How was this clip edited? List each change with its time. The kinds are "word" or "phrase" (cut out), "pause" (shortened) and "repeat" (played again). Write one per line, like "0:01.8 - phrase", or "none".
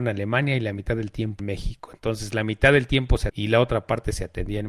0:01.4 - word
0:03.3 - phrase